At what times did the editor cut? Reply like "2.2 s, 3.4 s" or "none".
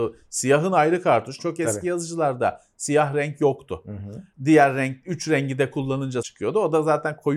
1.4 s, 4.3 s, 6.2 s